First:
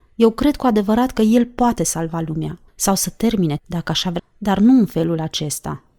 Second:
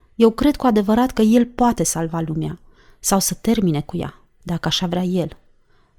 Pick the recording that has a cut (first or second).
first